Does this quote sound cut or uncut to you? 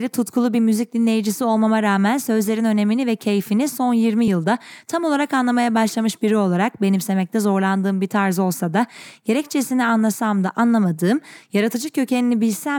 uncut